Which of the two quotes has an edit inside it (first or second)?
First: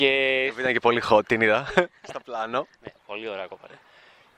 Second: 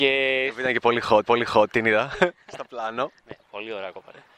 second